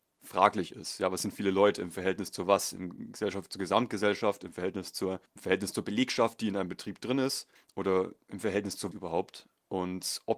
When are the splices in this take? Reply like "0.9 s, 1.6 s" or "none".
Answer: 5.4 s, 7.5 s, 8.9 s